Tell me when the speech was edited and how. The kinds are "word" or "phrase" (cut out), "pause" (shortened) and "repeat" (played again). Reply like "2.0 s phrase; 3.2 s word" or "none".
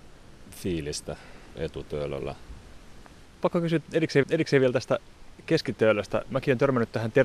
1.6 s word; 4.2 s repeat

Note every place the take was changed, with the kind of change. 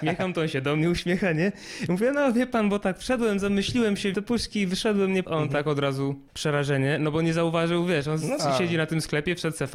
4.1 s word; 5.2 s word; 6.3 s pause; 8.4 s word

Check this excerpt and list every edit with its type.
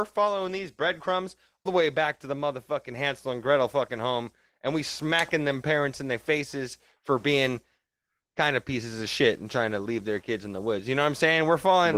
1.7 s word

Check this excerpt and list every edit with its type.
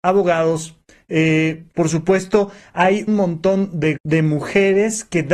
3.1 s word; 4.0 s word

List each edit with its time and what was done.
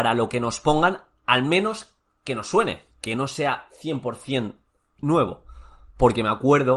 none

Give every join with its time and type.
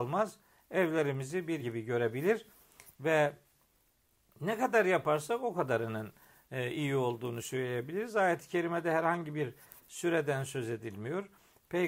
1.6 s word

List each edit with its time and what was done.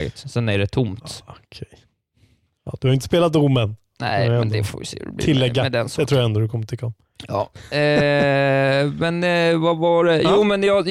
none

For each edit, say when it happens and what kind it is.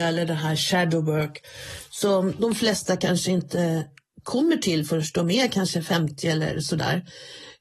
none

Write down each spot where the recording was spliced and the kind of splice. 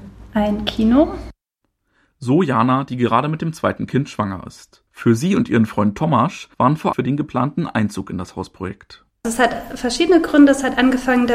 4.9 s pause; 6.5 s pause; 6.9 s phrase

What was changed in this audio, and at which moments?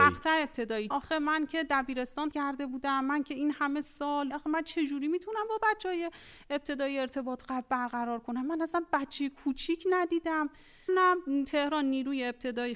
0.9 s word; 2.3 s word; 4.3 s word; 10.9 s word

